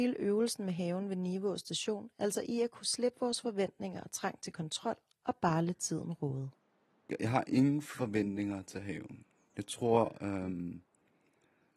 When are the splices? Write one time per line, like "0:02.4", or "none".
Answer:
none